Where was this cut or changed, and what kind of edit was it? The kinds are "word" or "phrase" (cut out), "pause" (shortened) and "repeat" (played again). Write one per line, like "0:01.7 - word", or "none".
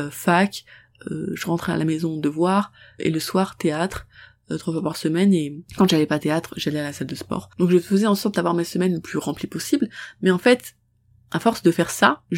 none

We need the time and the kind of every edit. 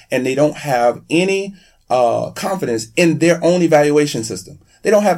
none

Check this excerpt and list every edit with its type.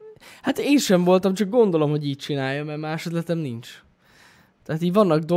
none

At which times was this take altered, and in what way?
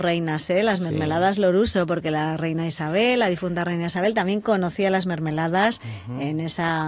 none

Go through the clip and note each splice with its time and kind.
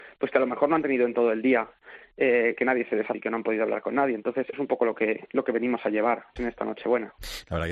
0:03.1 - word
0:04.5 - word
0:06.4 - word

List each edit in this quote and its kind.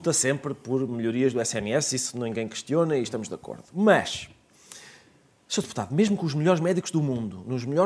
none

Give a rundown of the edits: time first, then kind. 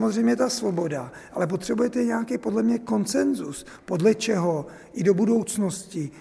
none

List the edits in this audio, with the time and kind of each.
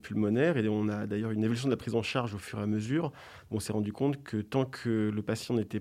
none

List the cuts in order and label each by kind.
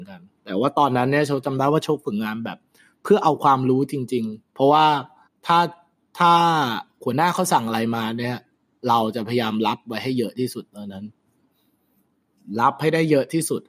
0:04.5 - word
0:05.3 - pause

